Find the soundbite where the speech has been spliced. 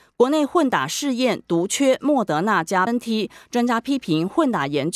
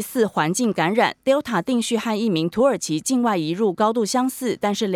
first; 1 cut; at 2.9 s

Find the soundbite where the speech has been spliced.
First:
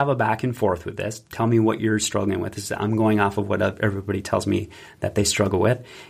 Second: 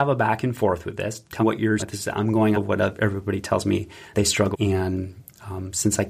second; 5 cuts; at 1.4 s, 1.8 s, 2.5 s, 4.1 s, 4.5 s

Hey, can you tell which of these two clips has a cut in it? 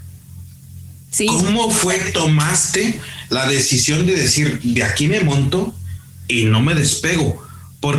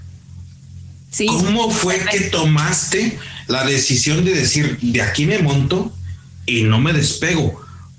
first; 1 cut; at 2.0 s

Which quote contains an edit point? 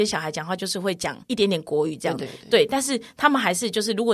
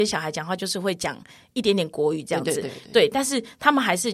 first; 2 cuts; at 1.2 s, 2.2 s

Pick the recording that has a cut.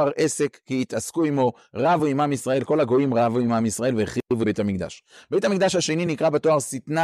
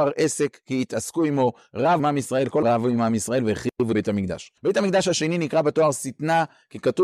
second; 3 cuts; at 2.0 s, 2.6 s, 4.6 s

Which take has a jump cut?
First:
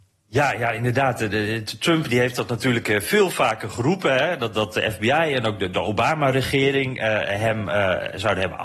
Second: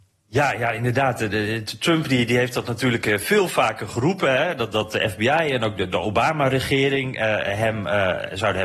first; 1 cut; at 2.1 s

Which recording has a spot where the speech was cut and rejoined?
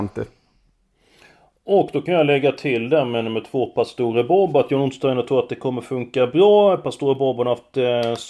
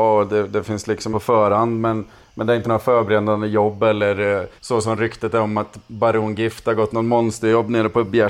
second; 3 cuts; at 1.1 s, 2.6 s, 4.6 s

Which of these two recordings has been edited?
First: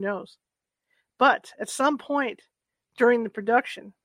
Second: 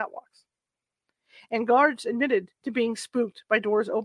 second; 1 cut; at 2.6 s

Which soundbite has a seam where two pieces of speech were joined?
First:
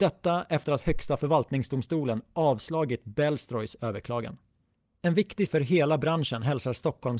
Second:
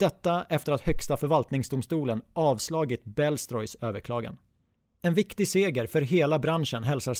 first; 1 cut; at 5.5 s

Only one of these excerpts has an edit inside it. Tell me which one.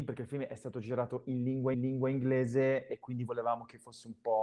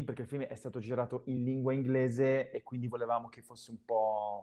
first; 1 cut; at 1.7 s

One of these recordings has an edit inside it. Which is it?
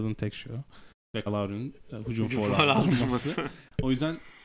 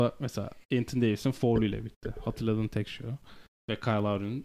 first; 1 cut; at 1.3 s

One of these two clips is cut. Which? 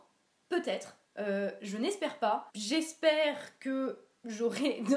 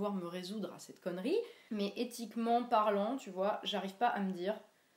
first; 1 cut; at 1.1 s

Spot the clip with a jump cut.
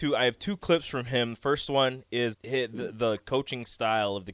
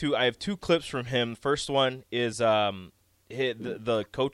first; 1 cut; at 2.3 s

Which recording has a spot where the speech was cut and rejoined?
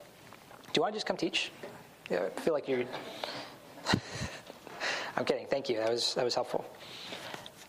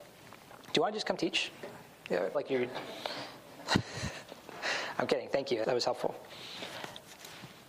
second; 2 cuts; at 2.3 s, 5.6 s

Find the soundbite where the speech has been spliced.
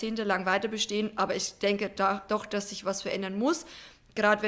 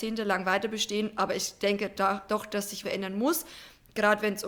second; 1 cut; at 2.8 s

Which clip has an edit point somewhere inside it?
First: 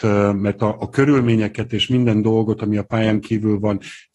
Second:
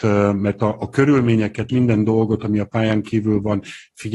second; 1 cut; at 1.7 s

